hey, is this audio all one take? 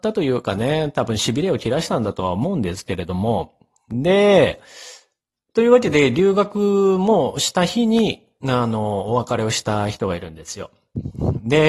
yes; 0 cuts

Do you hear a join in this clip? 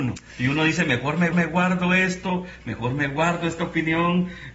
yes; 1 cut; at 1.3 s

